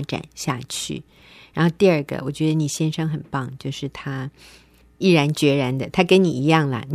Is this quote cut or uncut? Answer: uncut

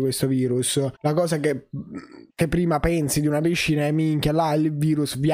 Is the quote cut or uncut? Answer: cut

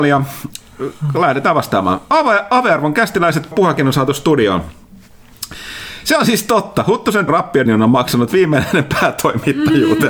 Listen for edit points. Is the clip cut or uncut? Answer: cut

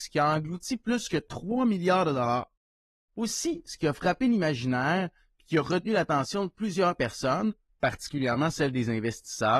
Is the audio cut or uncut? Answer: uncut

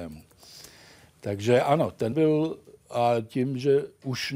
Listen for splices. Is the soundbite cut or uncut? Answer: cut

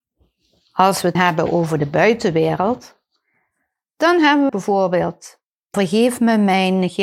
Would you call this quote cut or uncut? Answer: cut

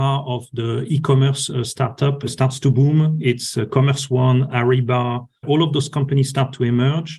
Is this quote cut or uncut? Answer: uncut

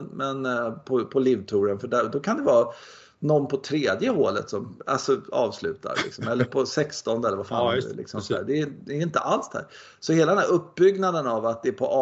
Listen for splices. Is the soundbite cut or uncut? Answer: uncut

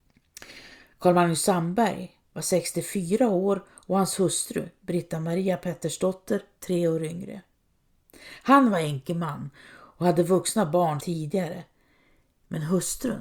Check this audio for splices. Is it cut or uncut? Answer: cut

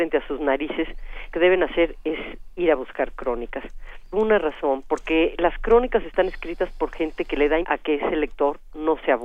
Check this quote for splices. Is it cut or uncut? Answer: cut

